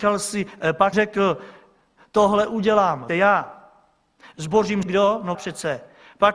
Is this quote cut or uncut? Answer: cut